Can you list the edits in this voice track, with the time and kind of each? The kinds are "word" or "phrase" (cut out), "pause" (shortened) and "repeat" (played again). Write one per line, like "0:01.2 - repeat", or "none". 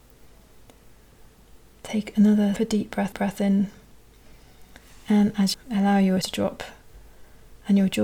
0:02.6 - word
0:03.1 - repeat
0:05.5 - phrase
0:06.2 - word